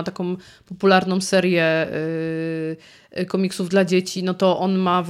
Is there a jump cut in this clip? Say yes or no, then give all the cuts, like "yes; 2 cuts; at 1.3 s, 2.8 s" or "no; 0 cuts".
no; 0 cuts